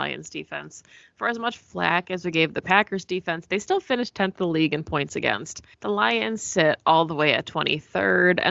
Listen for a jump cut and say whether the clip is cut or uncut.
cut